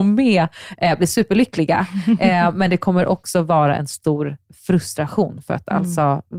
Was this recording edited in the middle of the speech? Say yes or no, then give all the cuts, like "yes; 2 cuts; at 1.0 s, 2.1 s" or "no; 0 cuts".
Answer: no; 0 cuts